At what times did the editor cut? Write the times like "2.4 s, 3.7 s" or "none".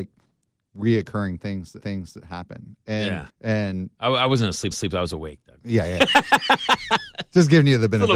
1.8 s, 3.3 s, 4.7 s